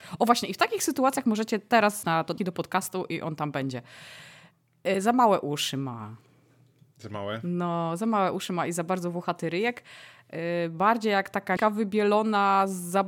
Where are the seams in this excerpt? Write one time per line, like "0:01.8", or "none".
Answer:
0:02.0
0:02.4
0:11.6